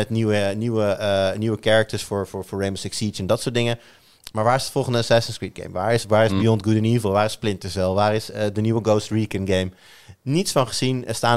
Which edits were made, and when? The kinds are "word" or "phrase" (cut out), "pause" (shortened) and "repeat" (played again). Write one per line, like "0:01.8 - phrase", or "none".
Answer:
none